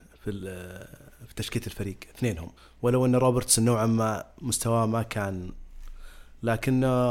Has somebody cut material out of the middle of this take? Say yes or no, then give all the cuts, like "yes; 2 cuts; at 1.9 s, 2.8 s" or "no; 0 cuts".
yes; 1 cut; at 2.6 s